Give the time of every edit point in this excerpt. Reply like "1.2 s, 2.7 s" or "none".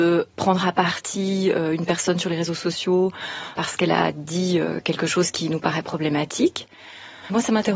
none